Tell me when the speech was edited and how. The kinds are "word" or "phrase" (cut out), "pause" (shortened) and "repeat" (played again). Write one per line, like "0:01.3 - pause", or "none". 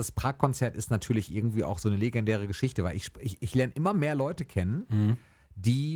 none